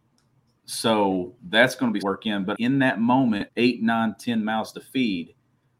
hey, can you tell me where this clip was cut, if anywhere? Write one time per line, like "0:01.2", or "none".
0:01.4
0:02.0
0:02.5
0:03.5